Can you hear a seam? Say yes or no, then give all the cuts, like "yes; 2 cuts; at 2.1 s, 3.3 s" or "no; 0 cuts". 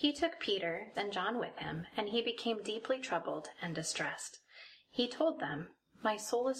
yes; 1 cut; at 0.9 s